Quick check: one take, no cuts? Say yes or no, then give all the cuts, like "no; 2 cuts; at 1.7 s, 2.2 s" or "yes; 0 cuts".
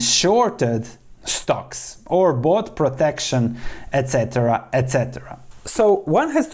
yes; 0 cuts